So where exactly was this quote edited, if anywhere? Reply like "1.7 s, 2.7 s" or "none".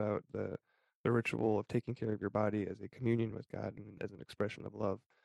none